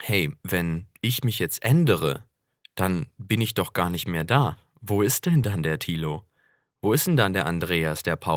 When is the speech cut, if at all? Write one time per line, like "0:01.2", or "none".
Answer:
none